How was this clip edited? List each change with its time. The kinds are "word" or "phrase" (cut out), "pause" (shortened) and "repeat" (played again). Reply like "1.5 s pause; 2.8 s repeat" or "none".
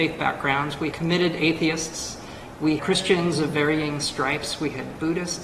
0.9 s word; 2.8 s word

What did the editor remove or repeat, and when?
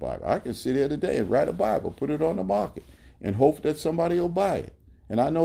none

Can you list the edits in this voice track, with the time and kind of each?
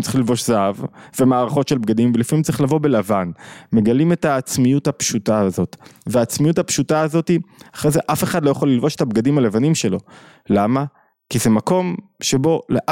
none

